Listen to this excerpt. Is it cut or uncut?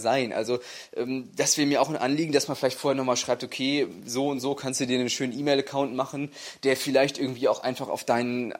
uncut